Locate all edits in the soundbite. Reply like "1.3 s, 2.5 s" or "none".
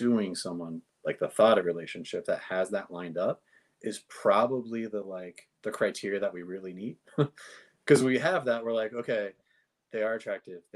5.5 s